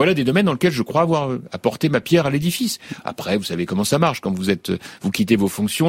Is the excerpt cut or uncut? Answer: uncut